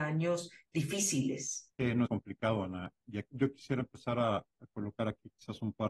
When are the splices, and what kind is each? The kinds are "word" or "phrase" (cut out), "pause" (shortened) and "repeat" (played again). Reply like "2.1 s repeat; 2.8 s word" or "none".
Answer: 1.7 s pause; 2.1 s phrase; 3.3 s word